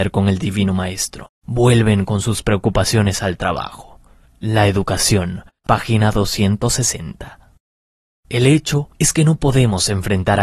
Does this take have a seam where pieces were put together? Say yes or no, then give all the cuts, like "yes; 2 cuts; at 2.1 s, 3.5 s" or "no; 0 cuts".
no; 0 cuts